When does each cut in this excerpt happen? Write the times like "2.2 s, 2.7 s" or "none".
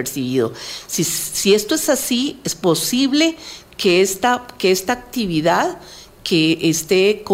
none